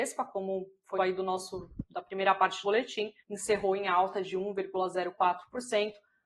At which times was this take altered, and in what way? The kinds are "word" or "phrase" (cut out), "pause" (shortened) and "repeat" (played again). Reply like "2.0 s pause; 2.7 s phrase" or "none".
1.0 s phrase; 2.6 s word; 3.2 s pause